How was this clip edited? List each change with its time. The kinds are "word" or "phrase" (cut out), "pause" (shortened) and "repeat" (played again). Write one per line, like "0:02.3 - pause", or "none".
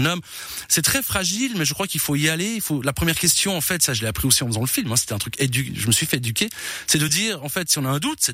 none